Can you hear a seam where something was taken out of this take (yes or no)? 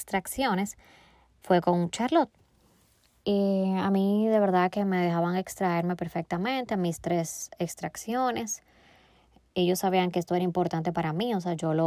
no